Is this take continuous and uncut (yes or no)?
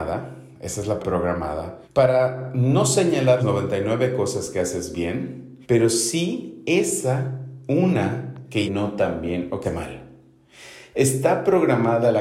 no